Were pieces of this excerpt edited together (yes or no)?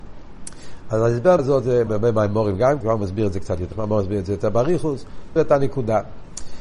yes